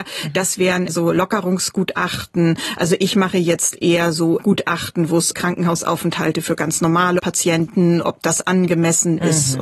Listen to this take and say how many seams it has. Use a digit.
1